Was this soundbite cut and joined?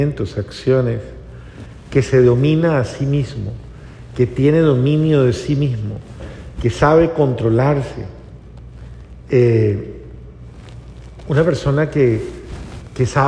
no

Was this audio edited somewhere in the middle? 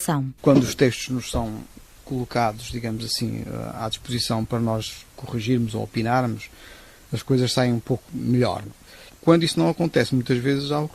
no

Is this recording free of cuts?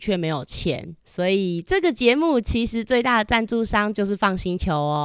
no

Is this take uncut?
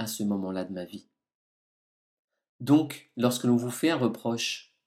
yes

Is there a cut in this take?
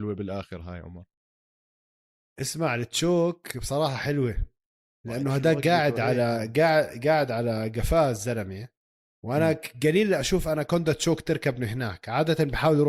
no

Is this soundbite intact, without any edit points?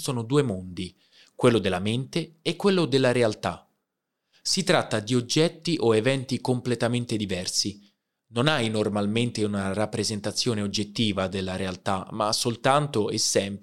yes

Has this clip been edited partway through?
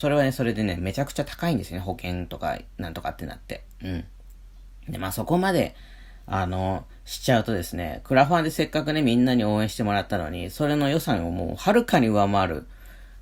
no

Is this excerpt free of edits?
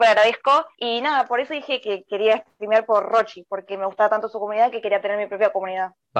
yes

